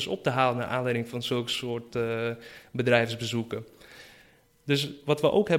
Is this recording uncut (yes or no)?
yes